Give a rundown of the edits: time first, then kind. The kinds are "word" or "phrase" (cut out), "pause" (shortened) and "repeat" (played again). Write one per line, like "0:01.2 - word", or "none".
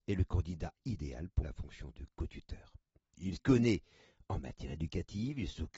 0:01.4 - word
0:03.4 - word